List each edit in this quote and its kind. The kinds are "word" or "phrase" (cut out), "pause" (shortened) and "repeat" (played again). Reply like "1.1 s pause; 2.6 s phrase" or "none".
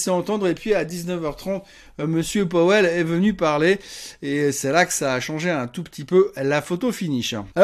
none